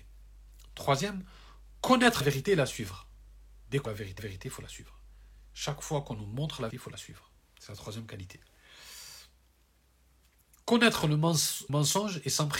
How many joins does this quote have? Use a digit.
6